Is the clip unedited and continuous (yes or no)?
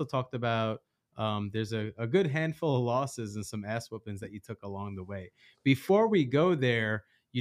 yes